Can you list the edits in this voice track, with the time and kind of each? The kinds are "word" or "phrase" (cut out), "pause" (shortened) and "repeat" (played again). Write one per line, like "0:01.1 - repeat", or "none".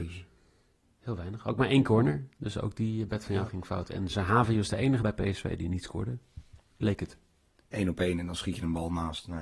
0:05.0 - word